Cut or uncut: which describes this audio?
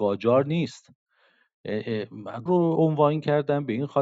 cut